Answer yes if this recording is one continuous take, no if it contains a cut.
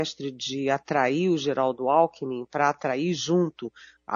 yes